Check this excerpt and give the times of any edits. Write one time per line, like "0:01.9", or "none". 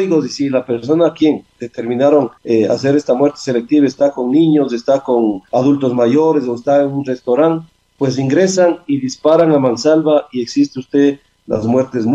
0:02.4
0:05.5